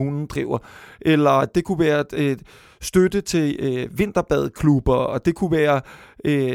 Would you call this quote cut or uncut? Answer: uncut